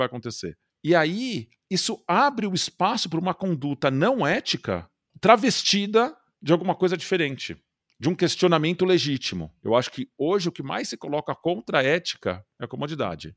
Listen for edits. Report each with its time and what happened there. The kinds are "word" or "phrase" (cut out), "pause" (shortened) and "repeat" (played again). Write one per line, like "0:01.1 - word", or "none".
none